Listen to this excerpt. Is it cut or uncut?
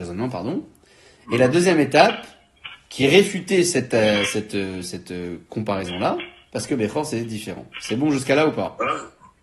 uncut